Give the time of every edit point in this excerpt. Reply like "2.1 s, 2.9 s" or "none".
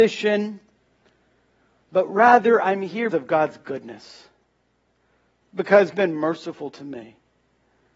3.1 s, 5.9 s